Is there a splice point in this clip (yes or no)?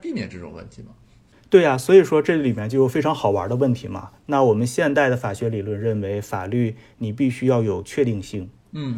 no